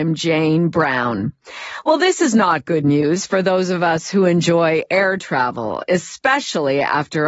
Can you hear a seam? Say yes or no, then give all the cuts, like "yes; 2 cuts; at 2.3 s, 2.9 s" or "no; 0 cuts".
no; 0 cuts